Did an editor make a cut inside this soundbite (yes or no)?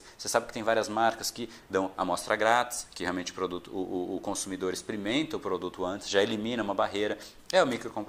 no